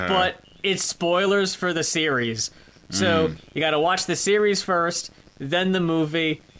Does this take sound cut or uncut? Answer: uncut